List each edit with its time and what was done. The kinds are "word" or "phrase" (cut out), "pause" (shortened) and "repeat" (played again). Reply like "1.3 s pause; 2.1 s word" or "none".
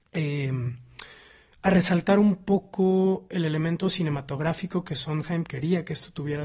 none